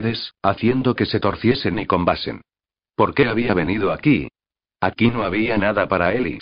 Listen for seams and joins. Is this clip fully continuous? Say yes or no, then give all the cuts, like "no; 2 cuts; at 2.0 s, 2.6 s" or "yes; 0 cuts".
yes; 0 cuts